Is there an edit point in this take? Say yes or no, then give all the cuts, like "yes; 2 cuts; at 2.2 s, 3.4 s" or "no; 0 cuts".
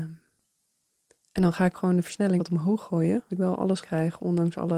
yes; 3 cuts; at 2.4 s, 3.3 s, 3.8 s